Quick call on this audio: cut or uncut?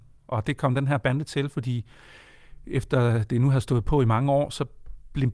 uncut